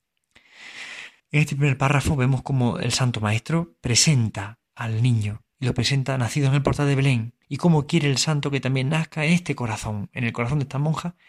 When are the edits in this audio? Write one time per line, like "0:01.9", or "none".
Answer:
0:01.2
0:04.7
0:07.4